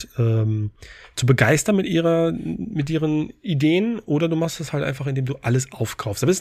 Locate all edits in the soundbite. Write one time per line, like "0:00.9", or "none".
none